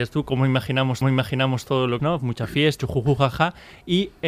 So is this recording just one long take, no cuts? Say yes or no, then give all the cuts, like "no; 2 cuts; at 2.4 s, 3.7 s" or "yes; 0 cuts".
no; 3 cuts; at 1.0 s, 2.0 s, 2.8 s